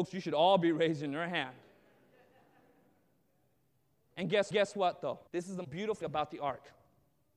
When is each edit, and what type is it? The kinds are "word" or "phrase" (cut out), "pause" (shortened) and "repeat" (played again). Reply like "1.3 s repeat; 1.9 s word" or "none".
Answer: 4.5 s repeat; 5.3 s pause; 5.6 s word; 6.0 s word